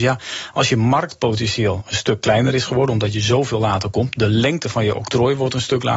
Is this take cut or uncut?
uncut